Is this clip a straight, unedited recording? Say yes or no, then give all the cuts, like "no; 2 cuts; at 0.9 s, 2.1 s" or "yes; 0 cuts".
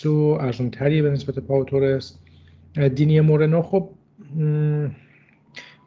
yes; 0 cuts